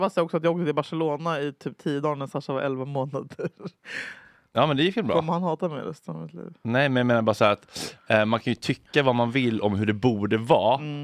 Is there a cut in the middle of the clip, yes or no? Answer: no